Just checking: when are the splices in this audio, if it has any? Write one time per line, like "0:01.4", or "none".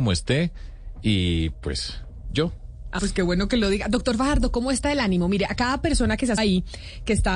0:02.3
0:03.0
0:06.4